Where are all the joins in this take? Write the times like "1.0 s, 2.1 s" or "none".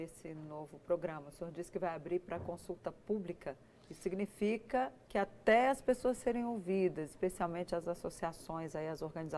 none